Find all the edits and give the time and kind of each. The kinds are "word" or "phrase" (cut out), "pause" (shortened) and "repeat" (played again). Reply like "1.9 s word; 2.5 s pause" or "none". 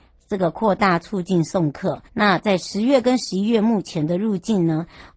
2.1 s pause